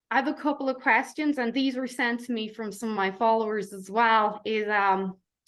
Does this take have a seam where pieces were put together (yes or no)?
no